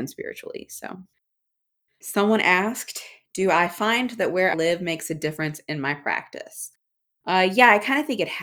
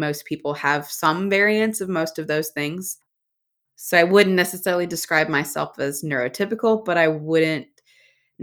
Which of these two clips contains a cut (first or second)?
first